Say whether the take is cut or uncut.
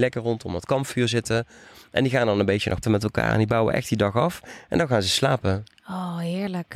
cut